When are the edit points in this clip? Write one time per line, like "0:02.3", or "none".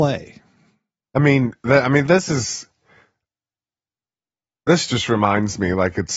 none